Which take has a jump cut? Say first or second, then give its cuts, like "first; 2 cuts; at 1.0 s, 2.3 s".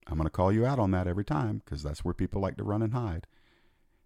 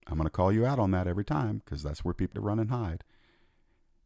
second; 1 cut; at 2.3 s